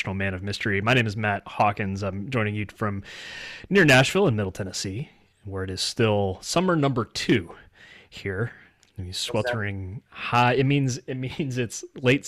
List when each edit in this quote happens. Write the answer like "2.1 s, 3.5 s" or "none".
none